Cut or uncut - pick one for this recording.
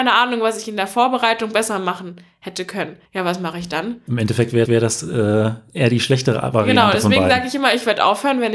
cut